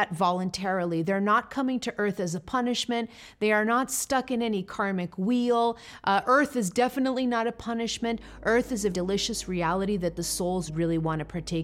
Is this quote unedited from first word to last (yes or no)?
no